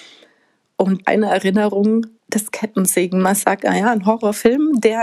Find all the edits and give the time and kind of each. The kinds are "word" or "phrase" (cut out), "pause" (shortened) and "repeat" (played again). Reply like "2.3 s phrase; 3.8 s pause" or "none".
1.0 s phrase; 2.2 s pause